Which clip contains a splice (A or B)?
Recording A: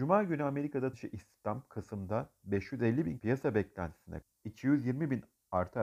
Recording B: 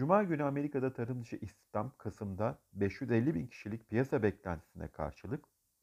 A